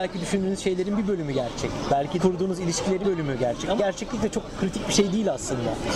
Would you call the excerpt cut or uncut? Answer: cut